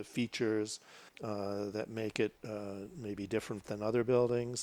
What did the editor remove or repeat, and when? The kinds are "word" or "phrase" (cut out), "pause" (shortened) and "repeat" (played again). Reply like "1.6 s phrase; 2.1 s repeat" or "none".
1.1 s pause; 2.4 s pause